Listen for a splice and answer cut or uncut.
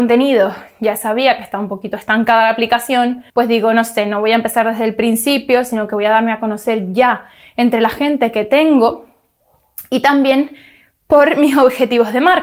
cut